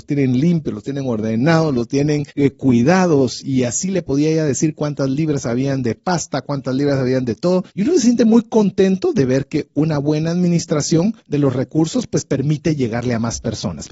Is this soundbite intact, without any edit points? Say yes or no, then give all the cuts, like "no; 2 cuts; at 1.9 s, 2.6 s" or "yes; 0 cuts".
no; 3 cuts; at 2.3 s, 7.7 s, 11.2 s